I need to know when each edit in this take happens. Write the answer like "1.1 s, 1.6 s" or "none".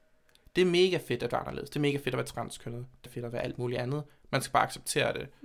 3.1 s